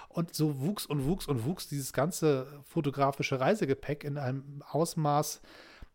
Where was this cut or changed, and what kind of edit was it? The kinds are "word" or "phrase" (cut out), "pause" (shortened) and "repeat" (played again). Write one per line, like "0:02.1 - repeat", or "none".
none